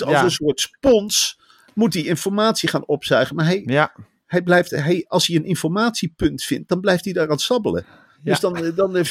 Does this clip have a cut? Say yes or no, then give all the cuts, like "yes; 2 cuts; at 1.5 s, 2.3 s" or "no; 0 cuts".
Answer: no; 0 cuts